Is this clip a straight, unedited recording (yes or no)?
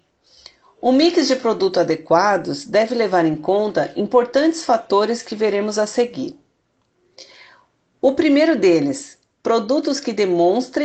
yes